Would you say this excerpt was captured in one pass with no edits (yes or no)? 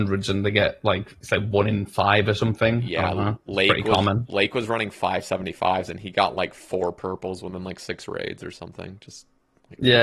no